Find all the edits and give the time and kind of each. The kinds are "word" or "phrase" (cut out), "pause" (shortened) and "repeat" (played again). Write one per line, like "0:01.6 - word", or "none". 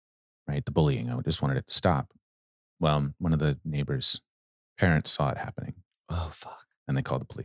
none